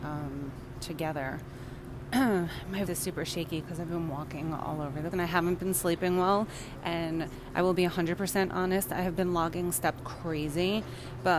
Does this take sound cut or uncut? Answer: cut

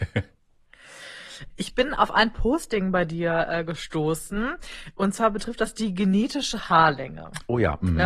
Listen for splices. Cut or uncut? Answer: cut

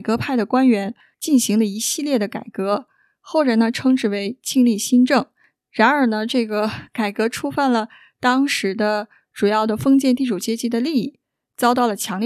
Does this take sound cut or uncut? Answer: uncut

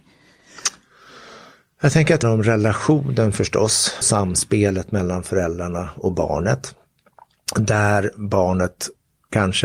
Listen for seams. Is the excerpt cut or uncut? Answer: cut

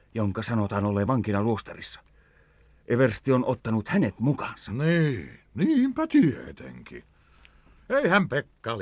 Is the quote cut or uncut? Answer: uncut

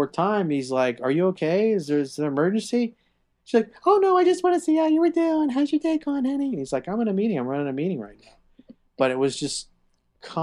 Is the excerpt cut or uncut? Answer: uncut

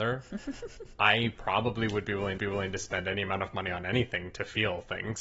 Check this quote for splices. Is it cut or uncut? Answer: cut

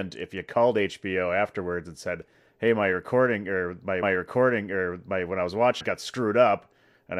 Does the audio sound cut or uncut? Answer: cut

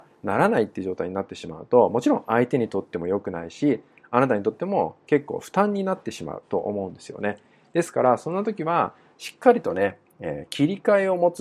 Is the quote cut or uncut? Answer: uncut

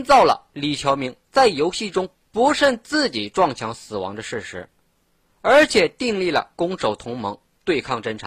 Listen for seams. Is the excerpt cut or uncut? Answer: uncut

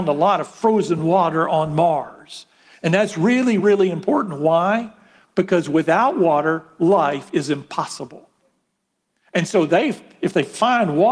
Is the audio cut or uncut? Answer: uncut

